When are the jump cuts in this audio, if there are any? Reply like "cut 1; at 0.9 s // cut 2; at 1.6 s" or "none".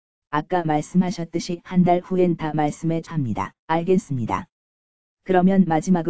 cut 1; at 3.0 s // cut 2; at 3.6 s